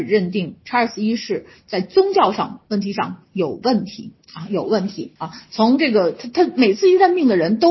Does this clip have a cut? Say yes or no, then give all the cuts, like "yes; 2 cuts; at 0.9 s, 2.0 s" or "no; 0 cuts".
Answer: yes; 1 cut; at 5.2 s